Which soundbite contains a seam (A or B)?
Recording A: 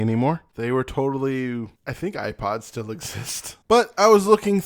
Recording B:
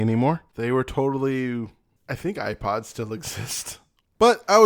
A